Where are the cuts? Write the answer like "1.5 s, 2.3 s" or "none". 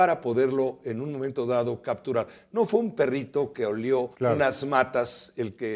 4.1 s